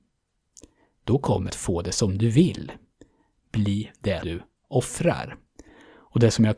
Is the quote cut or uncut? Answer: cut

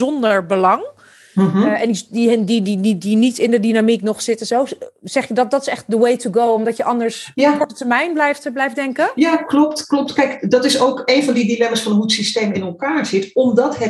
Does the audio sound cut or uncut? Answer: uncut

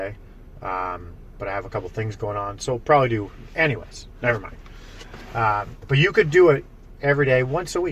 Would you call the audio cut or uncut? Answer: uncut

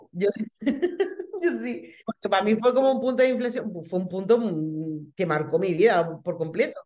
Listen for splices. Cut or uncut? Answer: cut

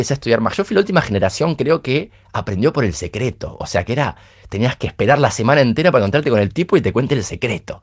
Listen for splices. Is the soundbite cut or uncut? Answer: uncut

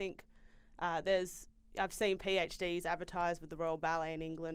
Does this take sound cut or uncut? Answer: uncut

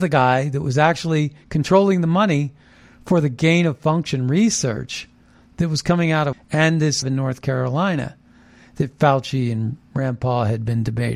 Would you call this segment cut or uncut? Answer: cut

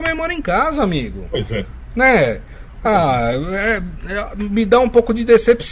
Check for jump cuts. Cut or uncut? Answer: uncut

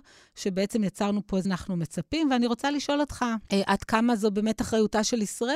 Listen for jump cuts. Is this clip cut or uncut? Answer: cut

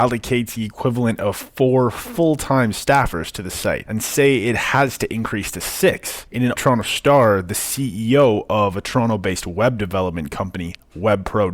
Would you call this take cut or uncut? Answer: cut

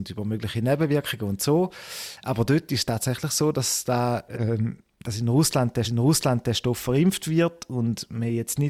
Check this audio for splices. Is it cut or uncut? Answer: cut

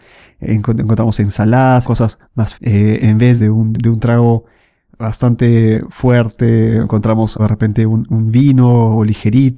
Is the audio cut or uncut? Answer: cut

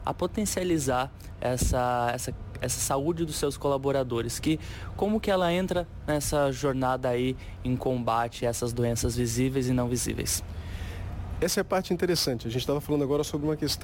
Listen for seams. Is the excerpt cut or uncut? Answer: uncut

